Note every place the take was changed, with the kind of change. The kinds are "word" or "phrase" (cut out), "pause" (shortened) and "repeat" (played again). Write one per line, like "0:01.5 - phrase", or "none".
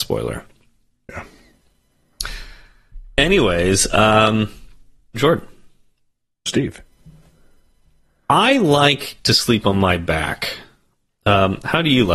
0:05.1 - word
0:06.5 - word